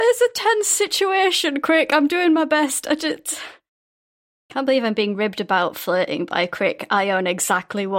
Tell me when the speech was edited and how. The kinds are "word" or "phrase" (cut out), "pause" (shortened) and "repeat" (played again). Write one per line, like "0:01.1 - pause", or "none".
none